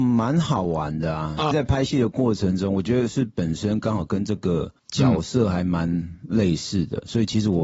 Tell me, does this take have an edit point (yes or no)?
yes